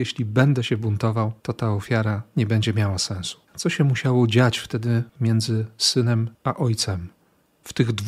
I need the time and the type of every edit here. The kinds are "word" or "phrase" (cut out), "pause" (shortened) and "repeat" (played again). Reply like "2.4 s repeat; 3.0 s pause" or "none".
1.4 s pause; 3.4 s pause; 6.3 s pause